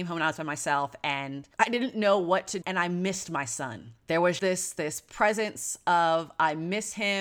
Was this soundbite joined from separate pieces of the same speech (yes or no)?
yes